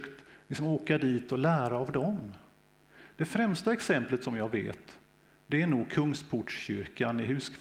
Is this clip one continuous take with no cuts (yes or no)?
yes